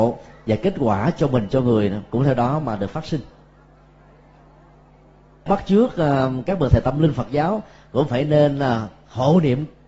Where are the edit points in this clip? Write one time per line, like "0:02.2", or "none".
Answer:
0:05.5